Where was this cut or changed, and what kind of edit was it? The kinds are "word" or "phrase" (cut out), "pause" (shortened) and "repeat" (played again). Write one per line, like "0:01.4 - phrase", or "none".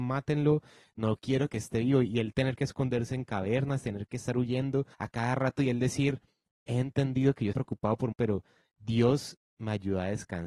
0:04.9 - pause
0:07.5 - word
0:08.1 - phrase